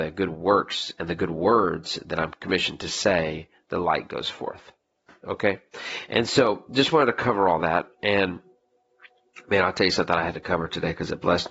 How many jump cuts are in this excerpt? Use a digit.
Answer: 0